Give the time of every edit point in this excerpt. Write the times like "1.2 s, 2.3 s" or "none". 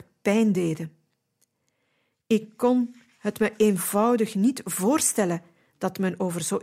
none